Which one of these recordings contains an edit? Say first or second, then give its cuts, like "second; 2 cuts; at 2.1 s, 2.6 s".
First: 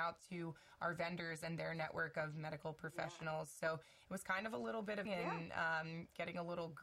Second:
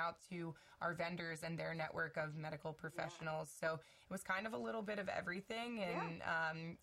first; 1 cut; at 5.1 s